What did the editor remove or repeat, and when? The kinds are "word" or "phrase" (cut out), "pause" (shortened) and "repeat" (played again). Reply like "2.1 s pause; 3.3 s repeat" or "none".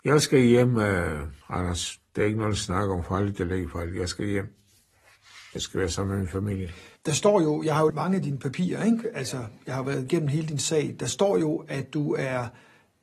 1.4 s pause; 7.0 s pause; 7.9 s word